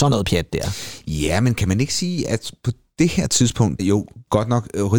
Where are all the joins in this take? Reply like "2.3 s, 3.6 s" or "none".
3.8 s